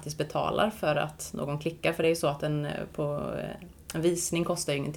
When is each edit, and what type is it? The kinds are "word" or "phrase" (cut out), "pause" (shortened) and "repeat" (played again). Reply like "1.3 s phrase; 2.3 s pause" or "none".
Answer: none